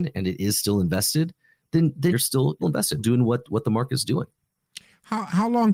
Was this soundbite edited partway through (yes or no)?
yes